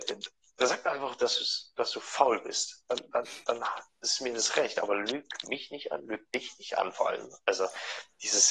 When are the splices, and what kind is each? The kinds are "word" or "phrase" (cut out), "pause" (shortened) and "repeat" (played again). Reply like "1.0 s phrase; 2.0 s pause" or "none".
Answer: none